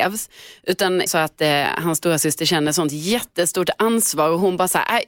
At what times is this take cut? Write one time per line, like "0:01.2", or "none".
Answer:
0:01.1